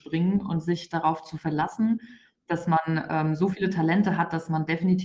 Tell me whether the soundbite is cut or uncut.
uncut